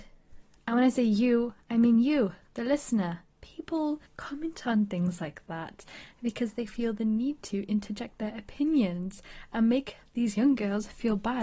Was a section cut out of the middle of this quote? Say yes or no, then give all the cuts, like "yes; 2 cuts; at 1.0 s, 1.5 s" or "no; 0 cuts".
yes; 1 cut; at 4.1 s